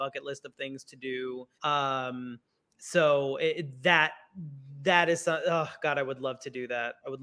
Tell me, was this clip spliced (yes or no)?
yes